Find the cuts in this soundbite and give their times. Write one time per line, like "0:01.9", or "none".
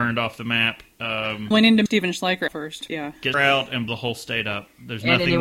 0:01.5
0:01.9
0:02.5
0:02.9
0:03.3
0:03.9